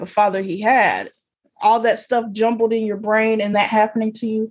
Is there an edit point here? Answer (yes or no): yes